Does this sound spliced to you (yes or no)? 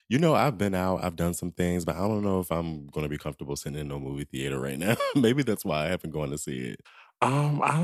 no